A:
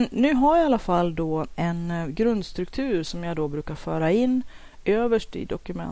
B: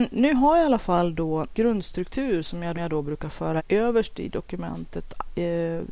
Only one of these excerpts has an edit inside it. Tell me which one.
B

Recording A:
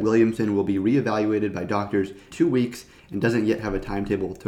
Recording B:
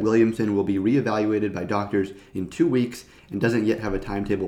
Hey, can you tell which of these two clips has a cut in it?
A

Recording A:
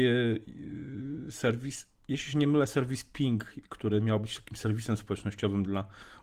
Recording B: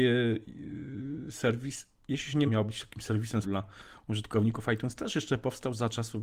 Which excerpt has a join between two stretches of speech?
B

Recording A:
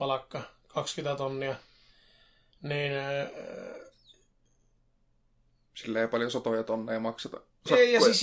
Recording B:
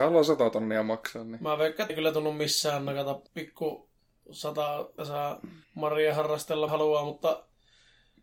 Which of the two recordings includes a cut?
B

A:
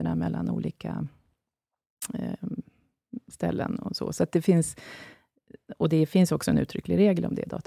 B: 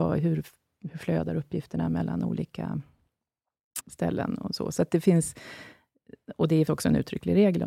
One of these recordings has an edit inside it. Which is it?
B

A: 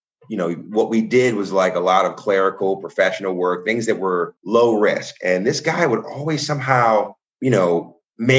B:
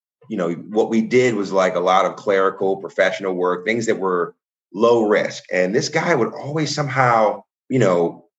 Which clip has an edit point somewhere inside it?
A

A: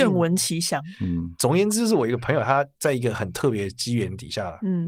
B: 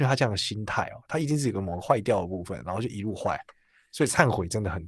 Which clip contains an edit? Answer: A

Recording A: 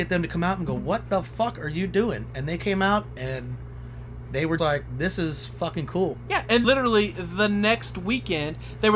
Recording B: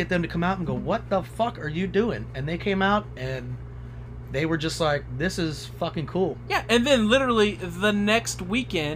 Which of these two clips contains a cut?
A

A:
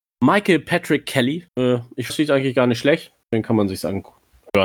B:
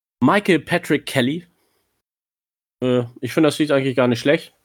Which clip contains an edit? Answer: A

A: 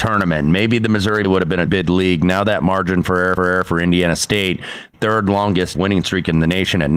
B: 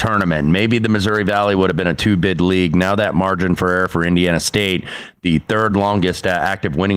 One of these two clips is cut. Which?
A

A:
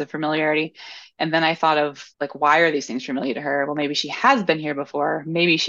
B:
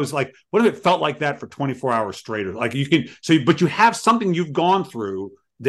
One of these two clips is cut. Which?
A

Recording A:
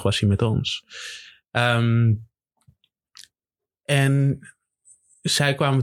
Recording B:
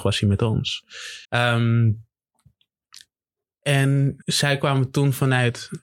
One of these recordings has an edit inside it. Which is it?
B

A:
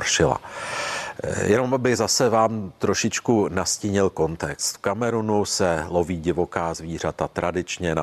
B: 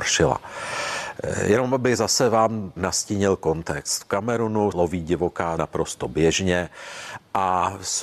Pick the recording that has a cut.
B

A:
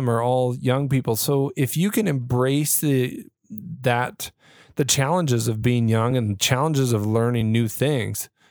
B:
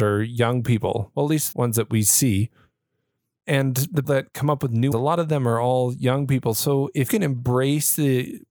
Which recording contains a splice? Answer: B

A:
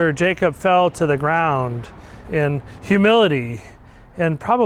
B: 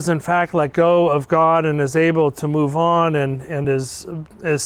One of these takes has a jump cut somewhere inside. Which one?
A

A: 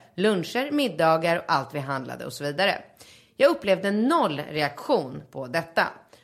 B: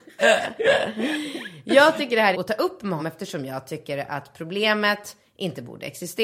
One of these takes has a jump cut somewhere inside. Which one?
B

